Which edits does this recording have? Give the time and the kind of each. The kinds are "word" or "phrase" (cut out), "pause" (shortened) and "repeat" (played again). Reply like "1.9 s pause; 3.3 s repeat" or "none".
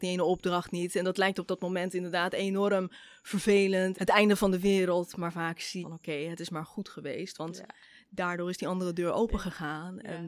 3.9 s word; 5.8 s word

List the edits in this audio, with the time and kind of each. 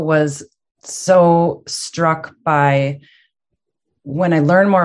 none

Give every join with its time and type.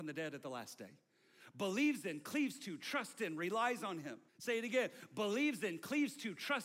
4.3 s pause

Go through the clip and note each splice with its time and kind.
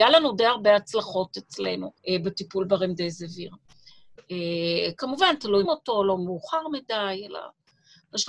2.0 s pause; 5.6 s phrase

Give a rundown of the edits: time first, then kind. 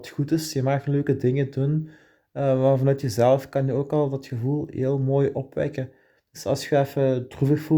none

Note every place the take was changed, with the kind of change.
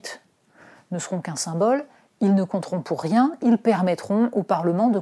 none

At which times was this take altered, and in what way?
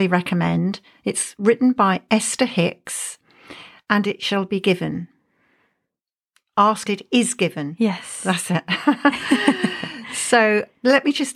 4.0 s phrase; 6.9 s word

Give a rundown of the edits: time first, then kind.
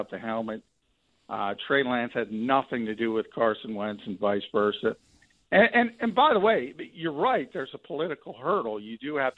none

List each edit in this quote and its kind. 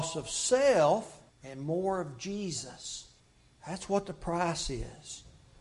1.3 s pause; 3.2 s pause

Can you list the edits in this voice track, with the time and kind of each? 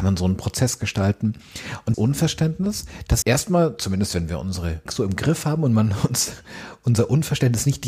1.9 s word; 3.2 s word; 4.9 s word

